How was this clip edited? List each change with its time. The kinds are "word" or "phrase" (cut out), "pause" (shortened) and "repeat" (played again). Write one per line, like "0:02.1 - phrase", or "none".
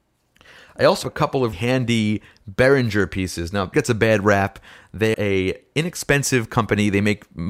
0:01.0 - word
0:01.5 - word
0:03.7 - word
0:05.1 - word